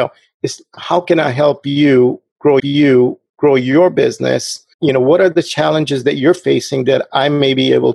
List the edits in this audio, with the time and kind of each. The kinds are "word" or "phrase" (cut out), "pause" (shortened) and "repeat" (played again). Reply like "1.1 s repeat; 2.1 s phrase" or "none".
2.6 s repeat; 4.7 s pause